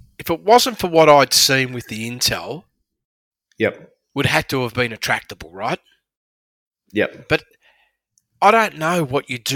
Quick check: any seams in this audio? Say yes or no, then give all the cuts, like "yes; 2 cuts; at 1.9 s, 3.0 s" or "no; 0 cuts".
no; 0 cuts